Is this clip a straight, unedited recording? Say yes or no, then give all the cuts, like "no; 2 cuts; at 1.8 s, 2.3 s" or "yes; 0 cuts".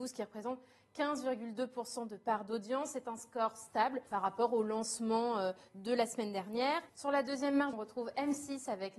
no; 3 cuts; at 4.1 s, 6.9 s, 7.7 s